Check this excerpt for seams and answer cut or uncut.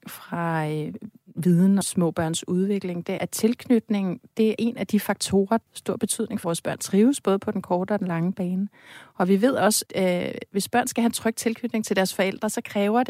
cut